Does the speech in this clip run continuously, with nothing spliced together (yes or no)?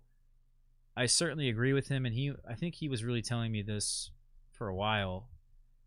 yes